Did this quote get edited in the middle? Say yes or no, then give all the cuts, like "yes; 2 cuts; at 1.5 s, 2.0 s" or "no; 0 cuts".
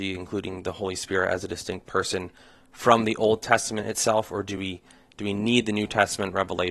no; 0 cuts